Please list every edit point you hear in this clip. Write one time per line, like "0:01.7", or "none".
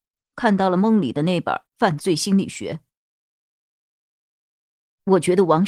0:01.7

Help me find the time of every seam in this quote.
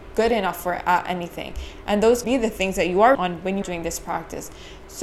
0:02.2
0:03.1
0:03.6

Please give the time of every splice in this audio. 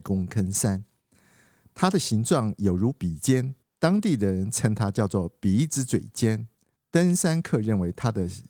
none

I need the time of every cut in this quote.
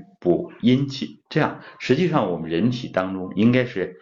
0:01.3

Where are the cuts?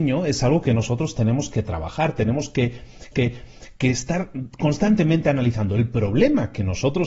0:03.1

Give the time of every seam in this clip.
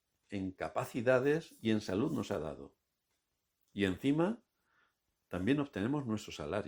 none

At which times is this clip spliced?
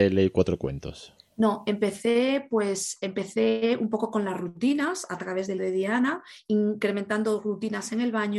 0:05.6

